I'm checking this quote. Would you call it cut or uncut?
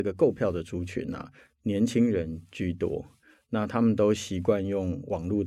uncut